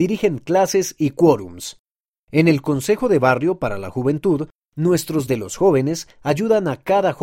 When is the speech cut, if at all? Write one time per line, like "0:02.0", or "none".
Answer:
0:05.3